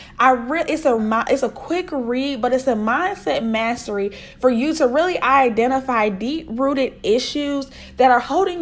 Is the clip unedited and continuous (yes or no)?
no